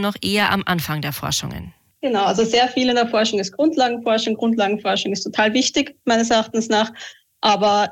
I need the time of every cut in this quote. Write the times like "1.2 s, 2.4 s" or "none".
none

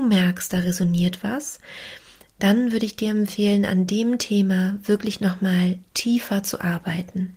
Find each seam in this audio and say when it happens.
none

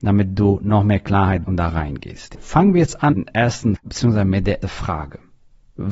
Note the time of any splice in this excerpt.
1.4 s, 3.1 s, 3.8 s, 4.6 s

